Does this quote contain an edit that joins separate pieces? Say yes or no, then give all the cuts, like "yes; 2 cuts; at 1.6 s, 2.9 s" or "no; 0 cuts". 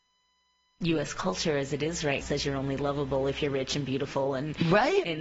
yes; 1 cut; at 2.2 s